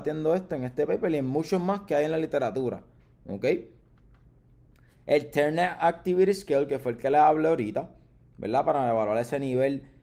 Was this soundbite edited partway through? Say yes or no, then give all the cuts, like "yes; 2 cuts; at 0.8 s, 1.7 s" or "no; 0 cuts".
no; 0 cuts